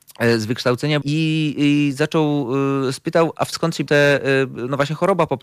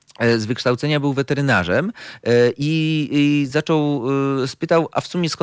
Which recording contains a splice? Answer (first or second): first